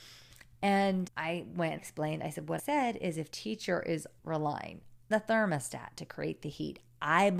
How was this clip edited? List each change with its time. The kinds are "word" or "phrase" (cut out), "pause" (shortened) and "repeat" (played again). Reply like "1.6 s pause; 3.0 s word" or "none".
1.1 s word; 1.8 s word; 2.6 s word; 3.3 s word; 4.2 s word; 5.1 s word